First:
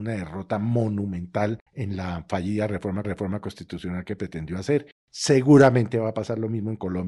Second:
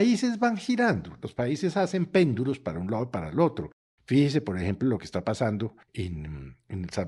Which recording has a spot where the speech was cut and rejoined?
first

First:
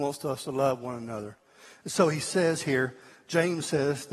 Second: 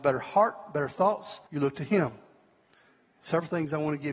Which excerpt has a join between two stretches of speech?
second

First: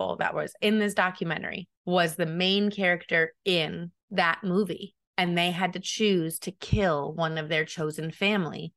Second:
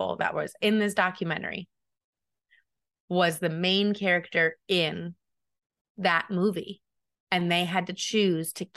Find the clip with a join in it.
first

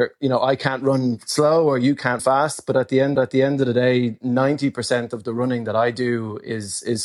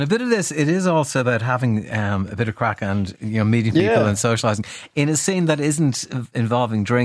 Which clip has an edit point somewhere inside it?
first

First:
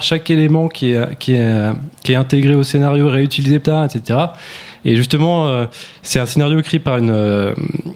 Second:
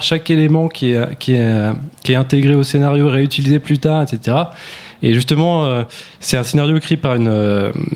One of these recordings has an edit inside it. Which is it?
first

